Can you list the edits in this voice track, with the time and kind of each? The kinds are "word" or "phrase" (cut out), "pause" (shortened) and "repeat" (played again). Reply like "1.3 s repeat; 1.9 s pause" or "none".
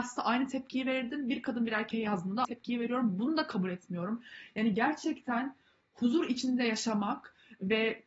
2.4 s word